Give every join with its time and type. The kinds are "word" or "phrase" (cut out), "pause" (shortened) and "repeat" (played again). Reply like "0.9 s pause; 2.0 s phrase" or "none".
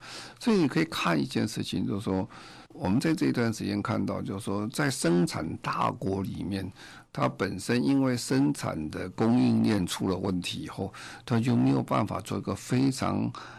2.7 s pause

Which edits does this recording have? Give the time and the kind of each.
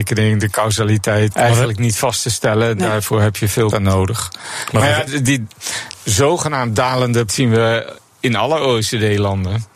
1.3 s word; 3.7 s phrase; 5.1 s word; 5.9 s word; 7.3 s word

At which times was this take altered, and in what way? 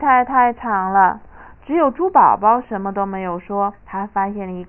1.3 s pause; 3.8 s pause

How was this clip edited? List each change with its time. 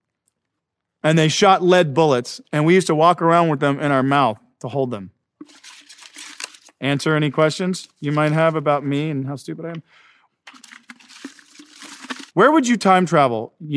6.6 s pause

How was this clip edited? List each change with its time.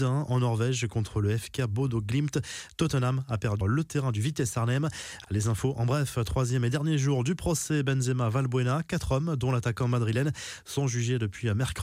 3.6 s word

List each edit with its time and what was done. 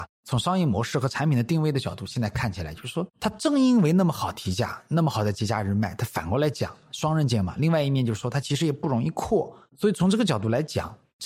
3.1 s pause

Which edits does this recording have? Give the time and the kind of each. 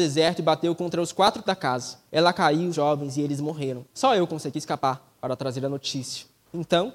1.4 s word; 2.1 s pause; 2.7 s phrase; 3.9 s pause

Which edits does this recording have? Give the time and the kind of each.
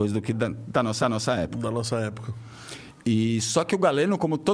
1.0 s repeat

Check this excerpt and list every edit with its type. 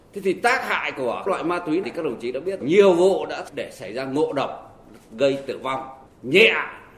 1.3 s word; 1.8 s word; 2.6 s word; 6.1 s pause

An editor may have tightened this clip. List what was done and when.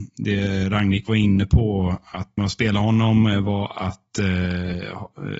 2.4 s word

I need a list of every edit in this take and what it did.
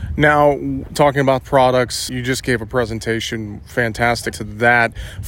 1.4 s word; 2.1 s word; 4.3 s word

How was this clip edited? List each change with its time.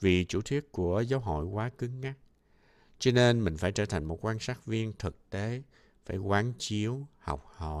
none

